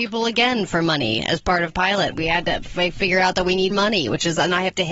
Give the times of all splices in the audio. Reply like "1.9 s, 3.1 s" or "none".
1.7 s, 3.7 s